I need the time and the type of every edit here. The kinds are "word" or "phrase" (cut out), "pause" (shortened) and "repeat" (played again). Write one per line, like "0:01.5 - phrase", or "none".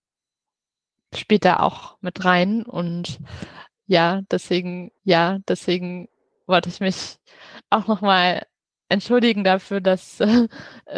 0:01.6 - phrase
0:05.0 - repeat
0:08.7 - pause